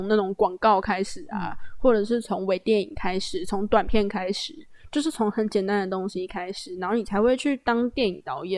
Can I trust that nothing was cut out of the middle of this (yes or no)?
yes